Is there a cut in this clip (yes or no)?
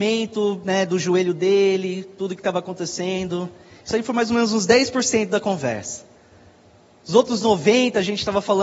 no